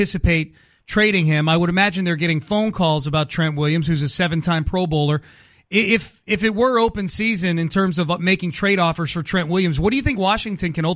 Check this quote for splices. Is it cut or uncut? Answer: uncut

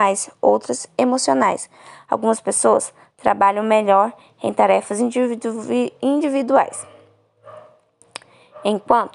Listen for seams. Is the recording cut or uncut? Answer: uncut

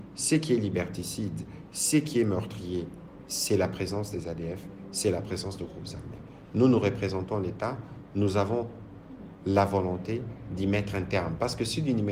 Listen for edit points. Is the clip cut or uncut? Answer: uncut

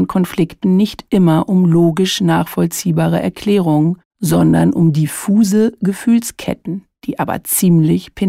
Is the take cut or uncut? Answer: cut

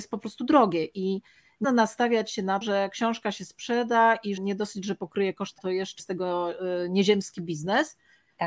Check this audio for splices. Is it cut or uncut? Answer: cut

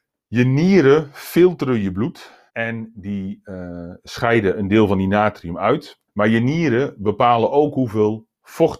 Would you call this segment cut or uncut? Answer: cut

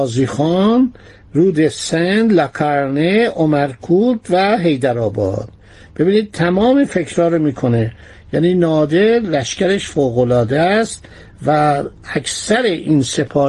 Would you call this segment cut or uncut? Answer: uncut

